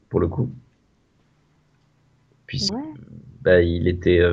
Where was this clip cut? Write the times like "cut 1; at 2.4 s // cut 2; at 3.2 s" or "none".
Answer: cut 1; at 2.7 s